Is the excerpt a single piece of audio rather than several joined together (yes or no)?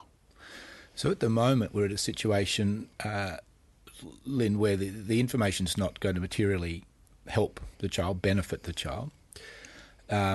no